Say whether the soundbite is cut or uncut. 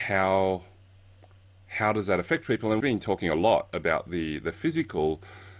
cut